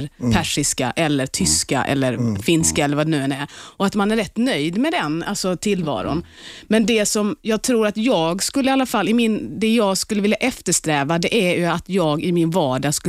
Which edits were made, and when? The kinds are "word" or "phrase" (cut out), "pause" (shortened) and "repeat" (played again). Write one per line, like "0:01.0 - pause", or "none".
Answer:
none